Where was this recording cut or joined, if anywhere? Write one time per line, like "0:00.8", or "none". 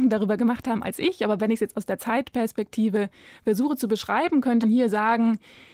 0:04.6